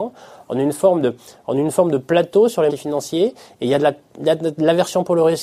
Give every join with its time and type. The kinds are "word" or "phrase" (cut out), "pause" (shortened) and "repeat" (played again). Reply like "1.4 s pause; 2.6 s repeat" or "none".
2.7 s word